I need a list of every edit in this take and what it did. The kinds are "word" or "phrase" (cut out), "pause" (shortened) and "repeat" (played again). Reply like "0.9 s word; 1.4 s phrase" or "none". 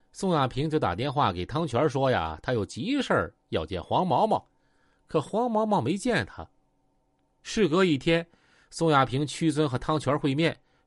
none